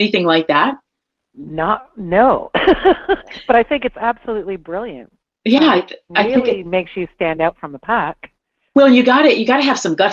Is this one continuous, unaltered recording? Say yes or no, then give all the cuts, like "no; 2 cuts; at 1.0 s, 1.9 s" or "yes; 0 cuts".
yes; 0 cuts